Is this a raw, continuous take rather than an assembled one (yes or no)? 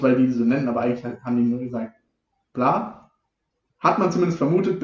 yes